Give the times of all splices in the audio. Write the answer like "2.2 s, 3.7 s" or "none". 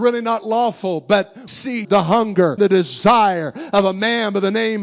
1.5 s, 1.8 s, 2.6 s